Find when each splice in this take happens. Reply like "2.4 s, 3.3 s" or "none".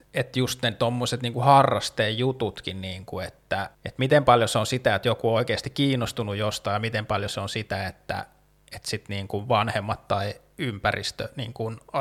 3.7 s